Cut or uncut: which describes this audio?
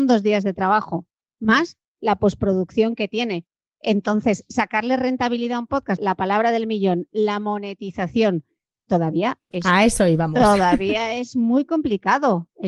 cut